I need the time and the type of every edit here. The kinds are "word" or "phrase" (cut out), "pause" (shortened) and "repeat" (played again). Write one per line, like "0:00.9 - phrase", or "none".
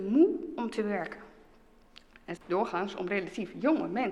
0:02.4 - word